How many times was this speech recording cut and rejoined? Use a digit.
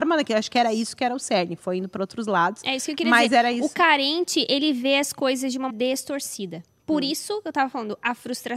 1